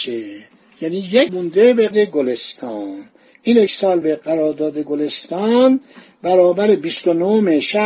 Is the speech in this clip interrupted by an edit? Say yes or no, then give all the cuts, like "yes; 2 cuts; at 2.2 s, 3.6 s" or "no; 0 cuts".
yes; 4 cuts; at 1.3 s, 1.9 s, 3.7 s, 4.0 s